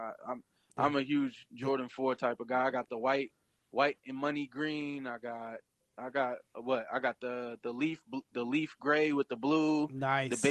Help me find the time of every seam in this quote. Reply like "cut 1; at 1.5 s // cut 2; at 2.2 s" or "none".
none

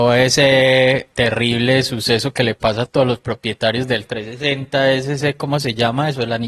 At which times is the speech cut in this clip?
cut 1; at 1.1 s

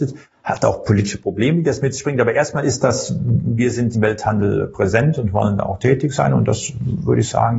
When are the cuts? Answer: cut 1; at 3.9 s

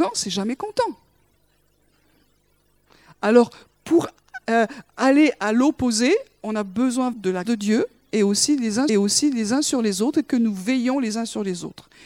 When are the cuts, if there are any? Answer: cut 1; at 7.1 s // cut 2; at 7.4 s // cut 3; at 8.9 s

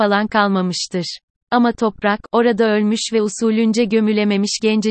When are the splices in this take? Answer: none

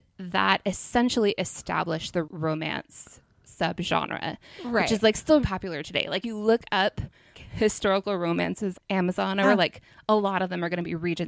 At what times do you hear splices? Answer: cut 1; at 2.2 s // cut 2; at 5.4 s // cut 3; at 6.2 s // cut 4; at 7.3 s // cut 5; at 8.7 s // cut 6; at 9.4 s

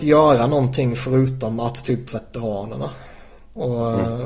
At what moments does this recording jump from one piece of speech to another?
cut 1; at 2.1 s

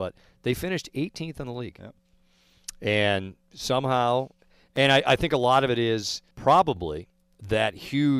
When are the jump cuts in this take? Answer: cut 1; at 6.3 s

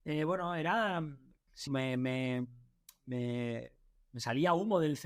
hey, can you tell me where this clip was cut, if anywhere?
cut 1; at 1.7 s

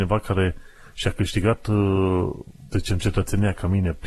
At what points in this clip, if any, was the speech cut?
cut 1; at 2.7 s

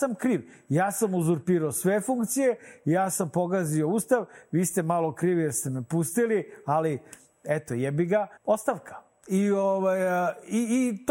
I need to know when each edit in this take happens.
cut 1; at 8.4 s

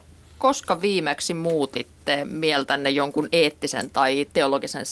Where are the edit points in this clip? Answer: none

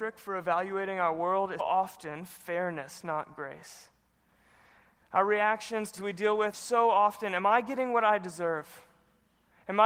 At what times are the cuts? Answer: cut 1; at 1.6 s // cut 2; at 6.0 s // cut 3; at 6.5 s

